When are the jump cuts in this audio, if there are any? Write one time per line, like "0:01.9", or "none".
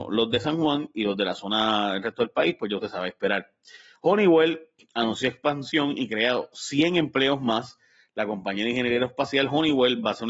none